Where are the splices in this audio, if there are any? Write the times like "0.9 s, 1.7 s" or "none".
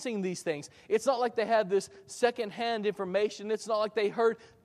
none